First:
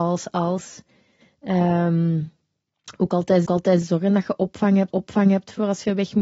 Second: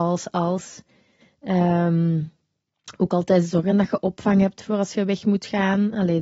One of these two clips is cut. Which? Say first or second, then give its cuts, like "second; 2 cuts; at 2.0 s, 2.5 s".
first; 2 cuts; at 3.5 s, 4.9 s